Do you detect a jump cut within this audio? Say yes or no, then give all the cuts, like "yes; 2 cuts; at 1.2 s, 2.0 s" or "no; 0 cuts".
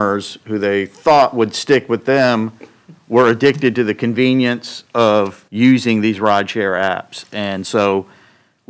yes; 1 cut; at 5.5 s